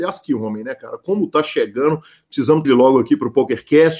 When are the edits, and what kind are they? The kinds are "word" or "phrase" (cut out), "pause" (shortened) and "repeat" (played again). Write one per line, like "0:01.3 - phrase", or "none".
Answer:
0:02.6 - word